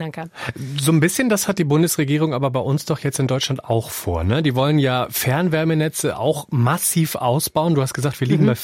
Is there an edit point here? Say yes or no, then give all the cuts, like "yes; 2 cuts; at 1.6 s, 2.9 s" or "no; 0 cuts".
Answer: no; 0 cuts